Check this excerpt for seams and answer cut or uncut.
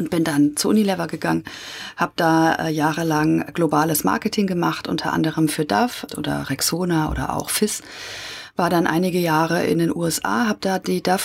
cut